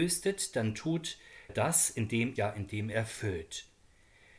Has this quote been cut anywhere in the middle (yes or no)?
yes